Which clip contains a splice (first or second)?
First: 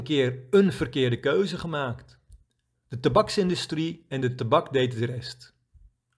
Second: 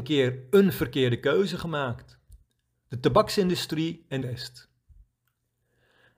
second